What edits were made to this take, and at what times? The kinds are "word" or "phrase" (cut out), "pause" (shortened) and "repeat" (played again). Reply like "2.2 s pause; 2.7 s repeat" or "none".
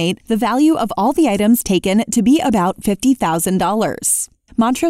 none

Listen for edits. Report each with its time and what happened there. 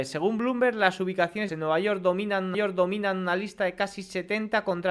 1.5 s word; 2.5 s repeat

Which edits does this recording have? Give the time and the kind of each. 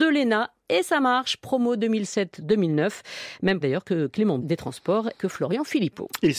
3.6 s word; 4.4 s phrase; 5.1 s word

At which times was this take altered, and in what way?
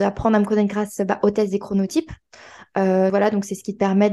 3.1 s word

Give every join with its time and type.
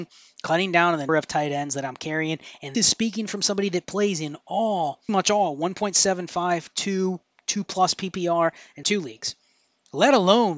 1.1 s word; 2.7 s word; 5.1 s word; 8.8 s word

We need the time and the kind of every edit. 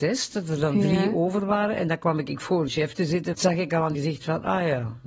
2.7 s word; 3.3 s word; 3.9 s word

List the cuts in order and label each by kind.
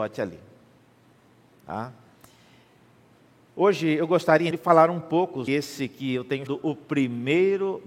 4.5 s word; 5.5 s word; 6.5 s word

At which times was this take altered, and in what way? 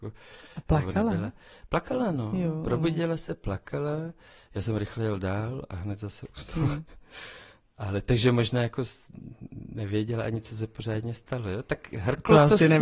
none

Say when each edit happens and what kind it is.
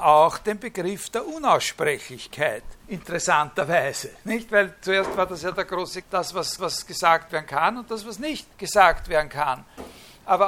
2.8 s pause; 6.0 s word; 6.6 s repeat; 8.5 s pause

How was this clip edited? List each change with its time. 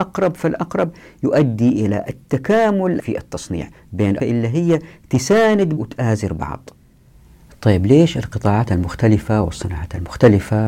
3.0 s word; 4.2 s phrase; 5.8 s word

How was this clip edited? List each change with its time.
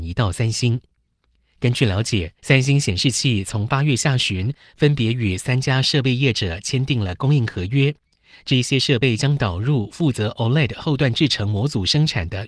2.4 s pause

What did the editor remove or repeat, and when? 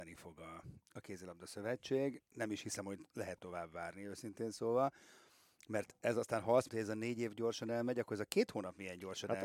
3.4 s word; 6.7 s word

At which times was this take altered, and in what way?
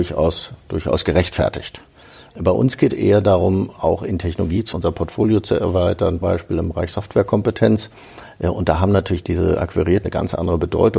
2.9 s word; 4.7 s word; 6.2 s word; 10.0 s word

